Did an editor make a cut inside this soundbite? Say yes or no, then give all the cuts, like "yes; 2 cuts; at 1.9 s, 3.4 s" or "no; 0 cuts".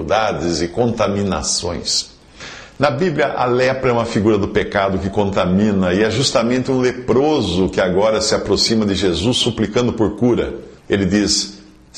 yes; 1 cut; at 10.8 s